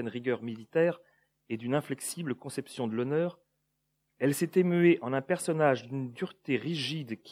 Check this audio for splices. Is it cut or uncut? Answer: uncut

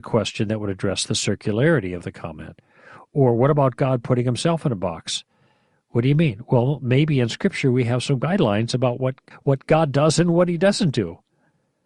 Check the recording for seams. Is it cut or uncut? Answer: cut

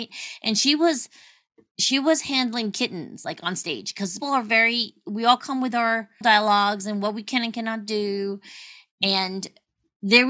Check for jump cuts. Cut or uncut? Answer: cut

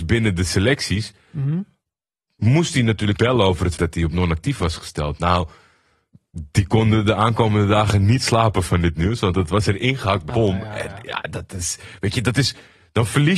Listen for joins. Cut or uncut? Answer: cut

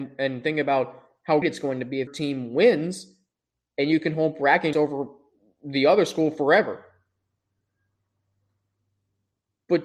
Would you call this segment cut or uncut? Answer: cut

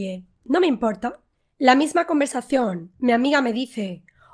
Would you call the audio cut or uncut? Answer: uncut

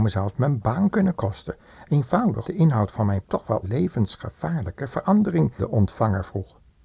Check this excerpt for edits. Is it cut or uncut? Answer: cut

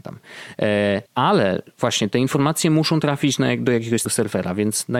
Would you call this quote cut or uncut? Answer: cut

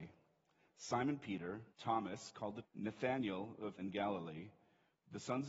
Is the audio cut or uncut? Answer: cut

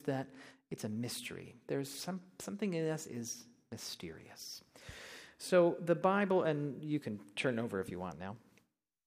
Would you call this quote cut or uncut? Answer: uncut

